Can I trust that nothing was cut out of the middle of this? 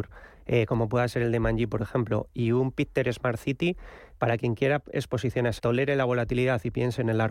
no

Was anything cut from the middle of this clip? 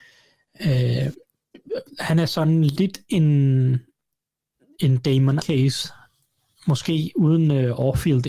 yes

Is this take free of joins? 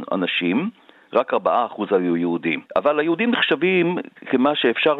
no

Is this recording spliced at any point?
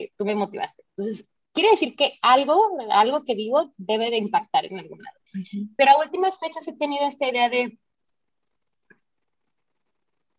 yes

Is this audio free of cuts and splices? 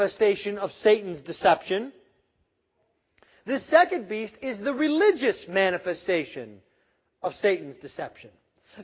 yes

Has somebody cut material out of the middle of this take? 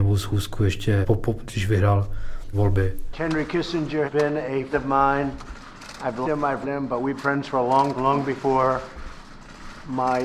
yes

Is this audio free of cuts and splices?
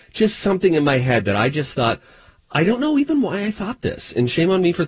yes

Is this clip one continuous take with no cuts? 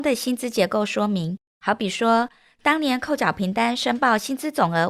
yes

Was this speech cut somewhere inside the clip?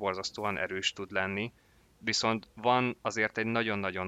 no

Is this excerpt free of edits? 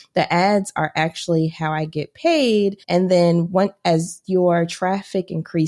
no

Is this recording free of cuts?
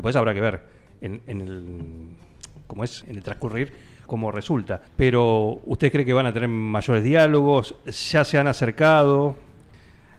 no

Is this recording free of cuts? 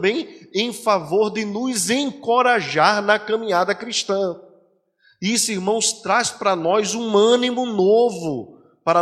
yes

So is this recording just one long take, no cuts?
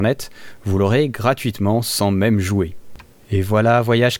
yes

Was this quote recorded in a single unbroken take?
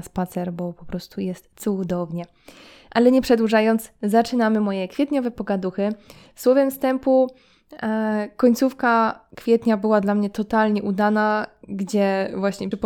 yes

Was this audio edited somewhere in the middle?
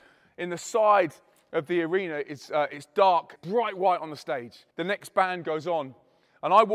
yes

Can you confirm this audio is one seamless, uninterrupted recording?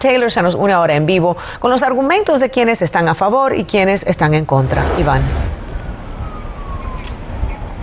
yes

